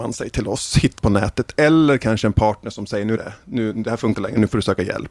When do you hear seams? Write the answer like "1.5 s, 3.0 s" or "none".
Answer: 1.0 s, 3.2 s, 4.1 s